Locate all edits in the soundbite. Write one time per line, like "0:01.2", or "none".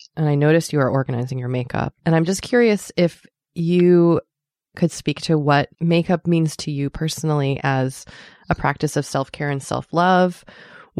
0:02.0
0:05.7